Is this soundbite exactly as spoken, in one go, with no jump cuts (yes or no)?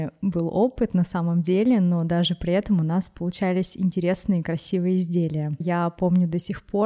no